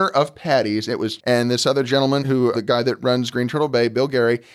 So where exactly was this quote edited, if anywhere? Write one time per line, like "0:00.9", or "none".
0:01.2
0:02.2
0:02.5

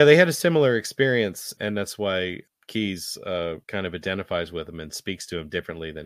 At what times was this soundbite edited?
0:01.6
0:02.5
0:03.6

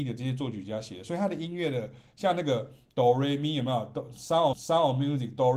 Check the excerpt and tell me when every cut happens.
0:04.5

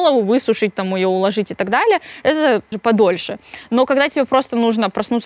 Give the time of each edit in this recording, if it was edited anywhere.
0:02.7

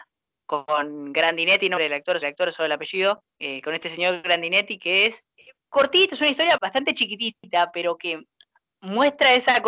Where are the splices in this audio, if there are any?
0:01.8
0:02.2
0:03.3
0:05.3
0:06.6
0:08.5

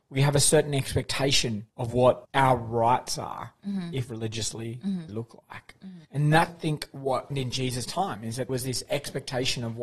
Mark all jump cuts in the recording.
0:01.7
0:02.2
0:04.1
0:05.1
0:06.0
0:06.5
0:07.3
0:08.5

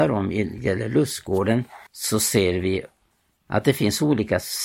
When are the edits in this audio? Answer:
0:01.9

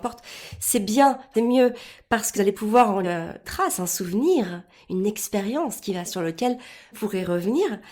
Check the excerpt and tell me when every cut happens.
0:01.3
0:02.3
0:03.0
0:03.4
0:06.0
0:06.9

